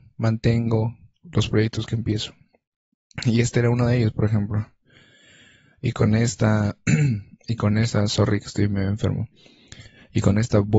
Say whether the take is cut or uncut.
uncut